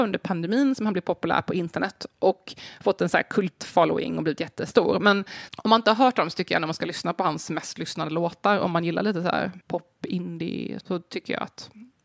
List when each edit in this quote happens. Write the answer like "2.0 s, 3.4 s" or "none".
5.5 s, 9.6 s, 10.8 s